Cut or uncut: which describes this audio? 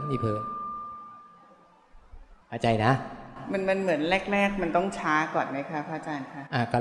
cut